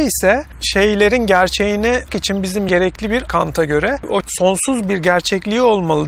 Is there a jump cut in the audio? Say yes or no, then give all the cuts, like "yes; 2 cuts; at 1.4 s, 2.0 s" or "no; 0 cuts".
yes; 4 cuts; at 2.1 s, 2.7 s, 3.3 s, 4.2 s